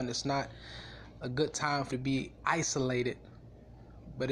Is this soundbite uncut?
no; 1 cut; at 1.9 s

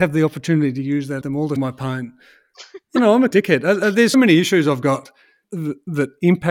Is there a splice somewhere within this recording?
yes; 6 cuts; at 1.2 s, 1.6 s, 3.0 s, 3.3 s, 4.1 s, 5.4 s

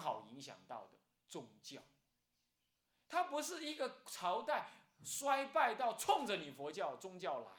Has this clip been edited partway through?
no; 0 cuts

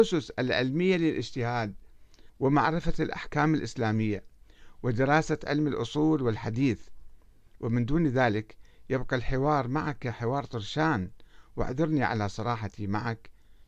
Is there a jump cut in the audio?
yes; 1 cut; at 2.3 s

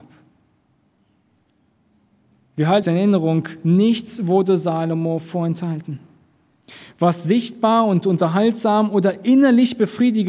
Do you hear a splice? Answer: yes; 1 cut; at 2.8 s

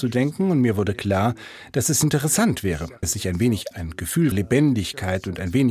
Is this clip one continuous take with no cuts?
no; 3 cuts; at 3.0 s, 3.7 s, 4.3 s

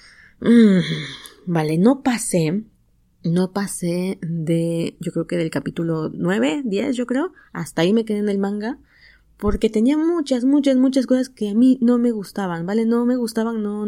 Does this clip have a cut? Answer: no; 0 cuts

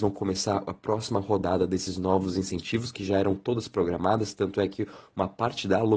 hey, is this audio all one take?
yes; 0 cuts

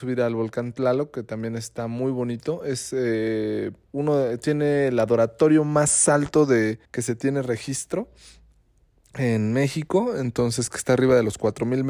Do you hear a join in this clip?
yes; 2 cuts; at 3.8 s, 6.8 s

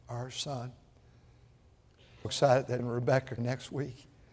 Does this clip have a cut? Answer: yes; 3 cuts; at 2.2 s, 2.8 s, 3.4 s

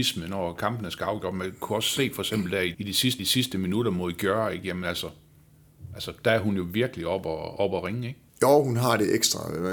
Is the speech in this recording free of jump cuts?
no; 3 cuts; at 2.7 s, 3.2 s, 8.3 s

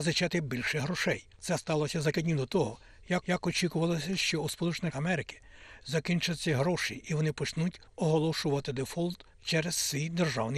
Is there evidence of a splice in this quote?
yes; 6 cuts; at 1.3 s, 2.1 s, 3.2 s, 4.9 s, 7.9 s, 9.3 s

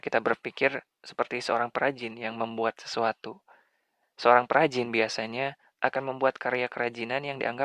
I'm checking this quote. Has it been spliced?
no; 0 cuts

